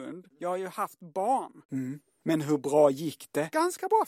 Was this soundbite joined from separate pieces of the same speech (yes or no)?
yes